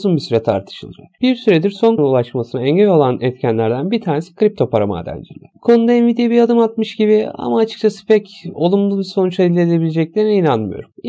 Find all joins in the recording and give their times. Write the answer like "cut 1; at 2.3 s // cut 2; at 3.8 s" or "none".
cut 1; at 2.0 s